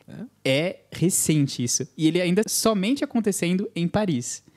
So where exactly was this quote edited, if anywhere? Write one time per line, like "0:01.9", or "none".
0:02.4